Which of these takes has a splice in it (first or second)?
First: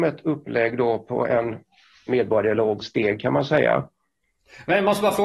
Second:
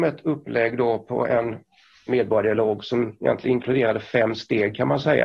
first